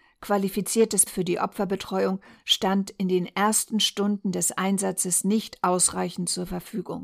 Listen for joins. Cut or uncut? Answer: cut